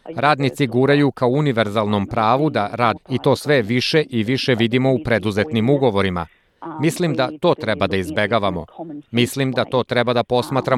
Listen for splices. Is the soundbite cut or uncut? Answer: cut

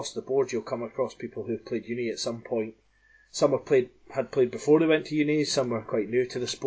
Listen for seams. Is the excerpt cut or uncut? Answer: uncut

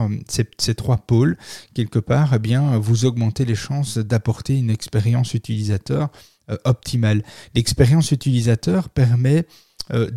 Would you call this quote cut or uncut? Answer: uncut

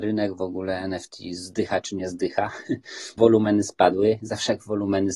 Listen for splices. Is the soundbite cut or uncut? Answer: cut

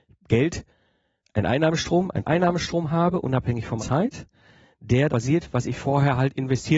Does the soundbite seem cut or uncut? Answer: cut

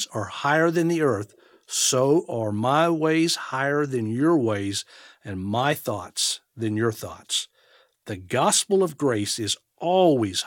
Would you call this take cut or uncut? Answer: uncut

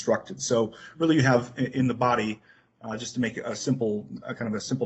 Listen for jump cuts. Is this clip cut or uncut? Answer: uncut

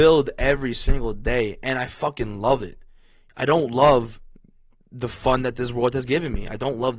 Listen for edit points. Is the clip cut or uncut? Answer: uncut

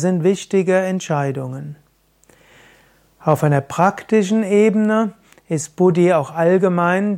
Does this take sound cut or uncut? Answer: uncut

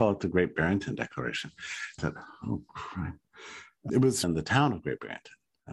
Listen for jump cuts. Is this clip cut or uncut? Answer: cut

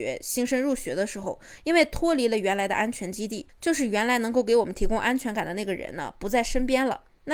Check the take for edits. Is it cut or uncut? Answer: cut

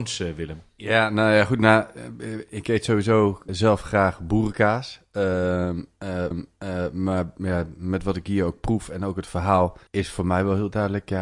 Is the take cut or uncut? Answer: cut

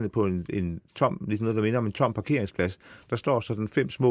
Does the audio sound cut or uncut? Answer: uncut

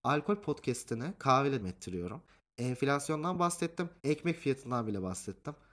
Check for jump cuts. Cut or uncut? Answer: cut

